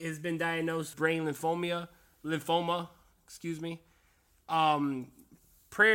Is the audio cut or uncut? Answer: cut